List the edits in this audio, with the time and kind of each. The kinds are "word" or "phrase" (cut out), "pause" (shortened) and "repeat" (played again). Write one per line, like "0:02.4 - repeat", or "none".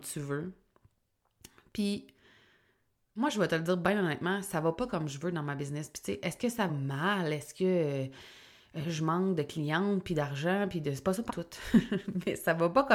0:06.7 - word
0:11.3 - word